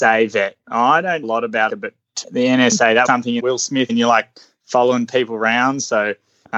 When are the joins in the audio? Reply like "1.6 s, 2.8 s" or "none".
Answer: 1.2 s, 1.7 s, 2.2 s, 3.1 s, 3.4 s, 3.9 s